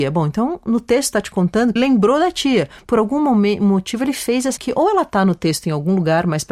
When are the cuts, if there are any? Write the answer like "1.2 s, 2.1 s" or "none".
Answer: 1.8 s, 4.6 s